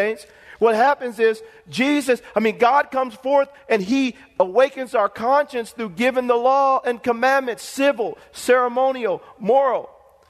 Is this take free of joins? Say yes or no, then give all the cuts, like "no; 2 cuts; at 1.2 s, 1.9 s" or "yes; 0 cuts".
yes; 0 cuts